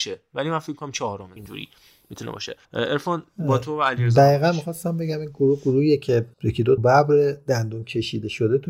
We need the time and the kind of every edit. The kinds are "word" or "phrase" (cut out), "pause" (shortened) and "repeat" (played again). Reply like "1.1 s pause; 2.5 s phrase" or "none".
1.4 s phrase; 2.6 s pause; 6.3 s pause; 6.8 s phrase